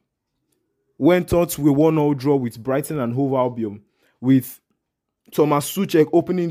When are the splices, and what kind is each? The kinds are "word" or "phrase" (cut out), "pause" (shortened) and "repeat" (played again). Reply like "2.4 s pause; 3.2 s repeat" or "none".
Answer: none

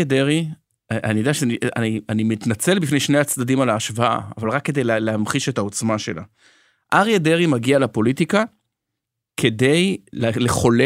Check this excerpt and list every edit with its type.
none

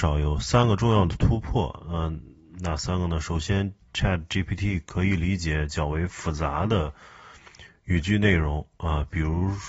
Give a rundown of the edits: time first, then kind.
none

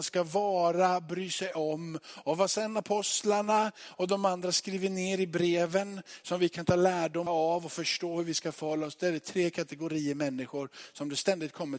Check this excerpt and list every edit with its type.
7.3 s word

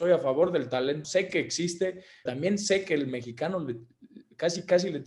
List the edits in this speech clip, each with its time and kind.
1.0 s word; 2.3 s word

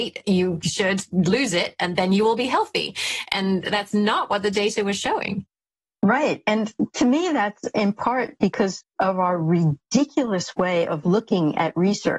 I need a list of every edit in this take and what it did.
none

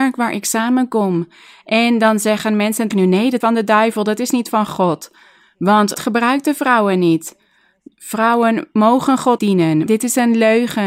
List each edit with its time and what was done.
2.9 s word; 3.4 s word; 5.9 s word; 9.4 s word; 9.9 s word

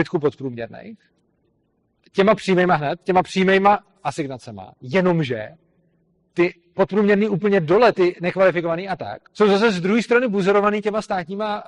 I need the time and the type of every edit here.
9.3 s pause

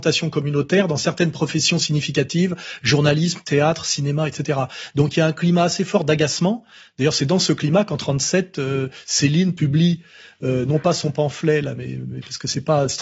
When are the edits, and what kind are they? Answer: none

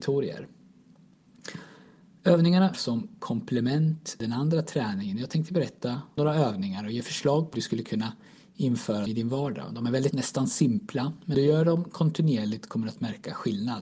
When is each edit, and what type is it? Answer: 2.7 s word; 4.2 s word; 6.2 s word; 7.5 s word; 9.1 s word; 10.1 s word; 11.3 s word

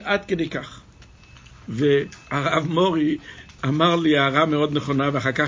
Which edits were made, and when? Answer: 3.6 s word

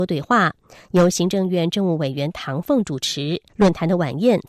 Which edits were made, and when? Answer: 3.5 s pause

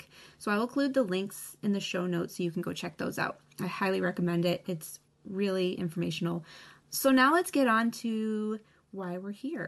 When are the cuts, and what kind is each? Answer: none

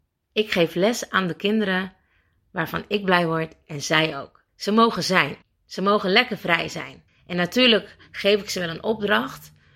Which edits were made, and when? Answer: 4.5 s pause; 5.4 s pause; 7.1 s pause

